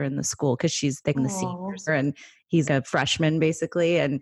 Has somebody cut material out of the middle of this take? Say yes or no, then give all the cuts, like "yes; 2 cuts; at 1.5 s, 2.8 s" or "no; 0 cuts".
yes; 3 cuts; at 1.1 s, 1.9 s, 2.6 s